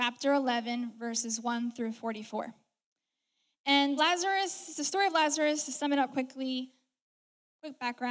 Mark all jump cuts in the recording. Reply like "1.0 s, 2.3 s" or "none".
4.0 s, 6.1 s